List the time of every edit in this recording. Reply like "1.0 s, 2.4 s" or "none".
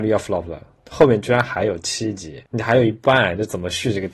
2.5 s

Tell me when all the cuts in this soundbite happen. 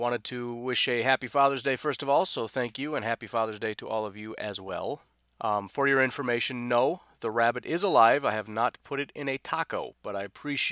none

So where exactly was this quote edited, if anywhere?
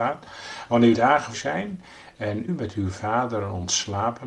0.9 s, 1.3 s, 2.5 s

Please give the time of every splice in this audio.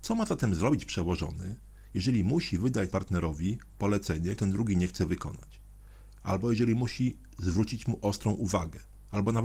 2.9 s, 4.4 s

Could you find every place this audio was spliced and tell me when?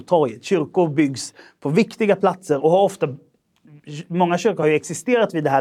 none

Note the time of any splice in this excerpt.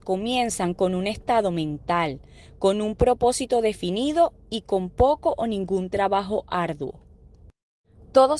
none

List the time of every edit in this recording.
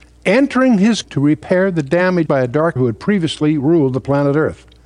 1.0 s, 2.3 s, 2.8 s

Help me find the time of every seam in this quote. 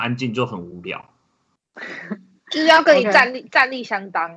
none

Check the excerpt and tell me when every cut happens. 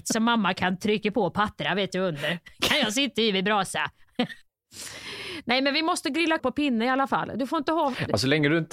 6.4 s

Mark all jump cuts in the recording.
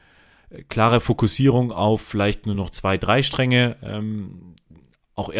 none

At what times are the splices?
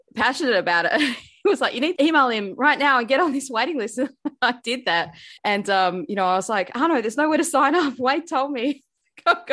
2.0 s, 5.4 s

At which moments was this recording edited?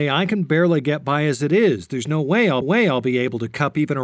2.6 s

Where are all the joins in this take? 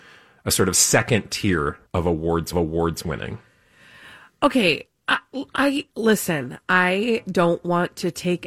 1.9 s, 2.5 s, 4.9 s, 5.9 s

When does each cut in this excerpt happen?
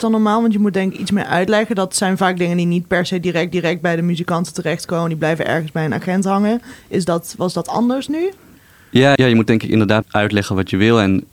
3.5 s, 9.2 s, 10.0 s

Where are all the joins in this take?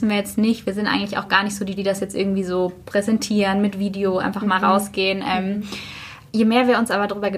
1.8 s, 6.3 s

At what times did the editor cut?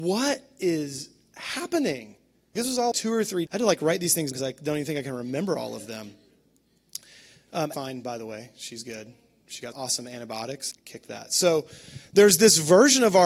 2.6 s, 2.9 s, 3.5 s, 4.3 s, 7.7 s, 9.7 s, 10.7 s

